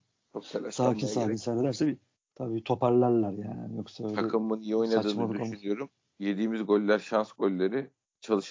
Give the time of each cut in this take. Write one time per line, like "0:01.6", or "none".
none